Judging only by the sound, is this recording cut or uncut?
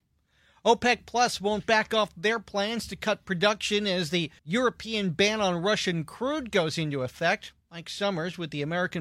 cut